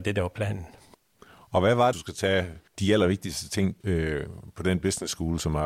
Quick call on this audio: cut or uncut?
cut